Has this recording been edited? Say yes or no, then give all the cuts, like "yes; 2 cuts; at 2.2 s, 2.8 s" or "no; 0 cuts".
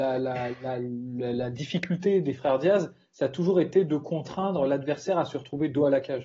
no; 0 cuts